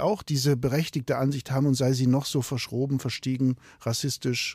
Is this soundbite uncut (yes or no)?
yes